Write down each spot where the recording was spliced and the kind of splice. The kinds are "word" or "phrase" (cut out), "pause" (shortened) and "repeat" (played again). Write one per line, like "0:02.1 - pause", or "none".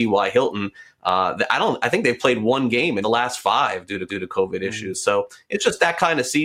0:03.0 - word
0:04.1 - repeat

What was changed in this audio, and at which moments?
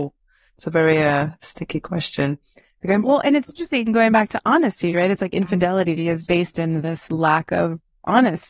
0:03.0 - phrase
0:06.3 - word

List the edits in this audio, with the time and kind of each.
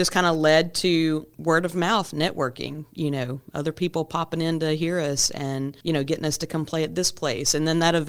0:05.8 - pause

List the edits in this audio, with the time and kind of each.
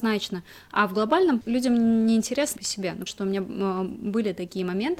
0:01.4 - word
0:02.6 - phrase
0:03.1 - word

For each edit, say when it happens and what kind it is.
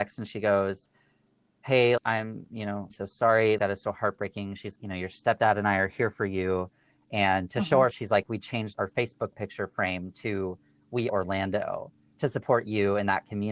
0:02.0 - word
0:02.9 - word
0:03.6 - word
0:04.8 - word
0:07.9 - word
0:08.7 - word
0:09.3 - word
0:11.1 - word

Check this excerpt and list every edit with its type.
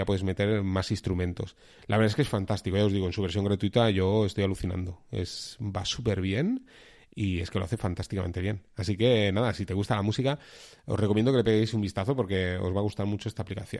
none

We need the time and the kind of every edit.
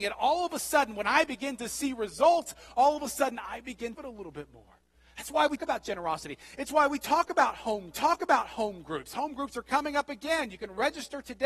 0:03.9 - phrase
0:05.6 - word
0:07.9 - repeat

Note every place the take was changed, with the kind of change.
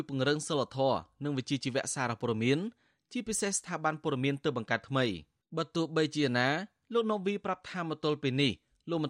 0:05.4 - pause

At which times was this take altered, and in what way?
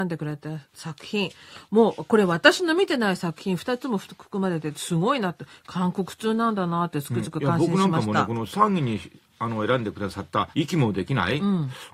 0:10.5 - pause

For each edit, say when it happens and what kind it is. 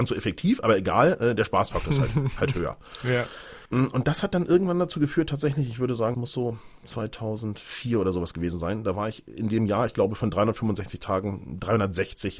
0:03.7 - pause
0:06.1 - word

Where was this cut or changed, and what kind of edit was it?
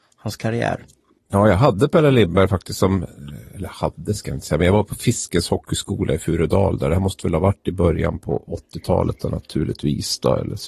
0:01.2 - pause

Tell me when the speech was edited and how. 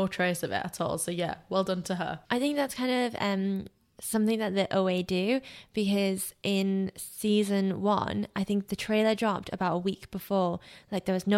0:02.2 - pause

